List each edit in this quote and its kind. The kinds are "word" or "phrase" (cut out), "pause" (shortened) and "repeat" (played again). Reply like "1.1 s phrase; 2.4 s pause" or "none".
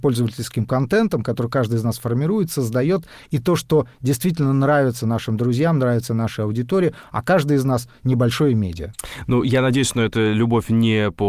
none